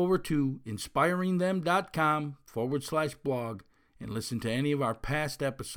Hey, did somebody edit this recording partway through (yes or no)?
no